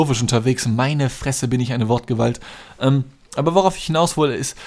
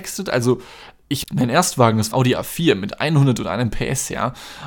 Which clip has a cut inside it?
second; 2 cuts; at 1.2 s, 2.1 s

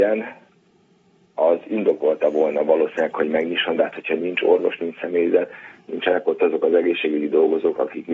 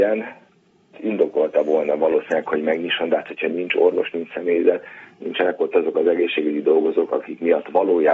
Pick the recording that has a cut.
second; 1 cut; at 0.9 s

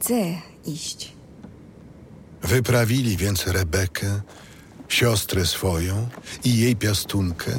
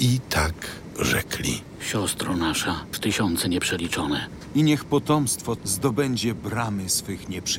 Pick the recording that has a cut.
second; 2 cuts; at 2.9 s, 5.6 s

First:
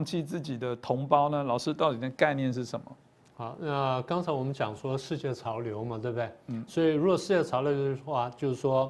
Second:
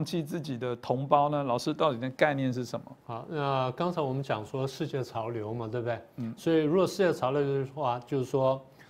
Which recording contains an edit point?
second; 1 cut; at 3.0 s

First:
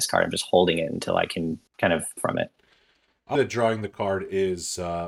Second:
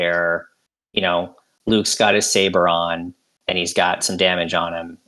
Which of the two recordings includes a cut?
first; 3 cuts; at 1.7 s, 2.2 s, 3.3 s

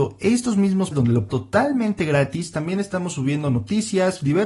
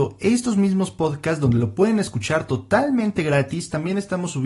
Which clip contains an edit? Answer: first; 2 cuts; at 0.9 s, 1.3 s

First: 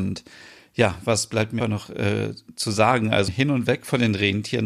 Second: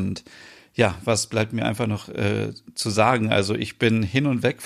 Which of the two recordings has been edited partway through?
first; 2 cuts; at 1.6 s, 3.3 s

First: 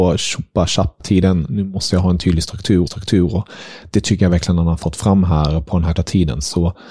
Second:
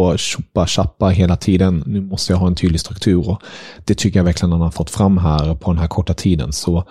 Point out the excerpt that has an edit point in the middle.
first; 3 cuts; at 1.0 s, 2.9 s, 5.9 s

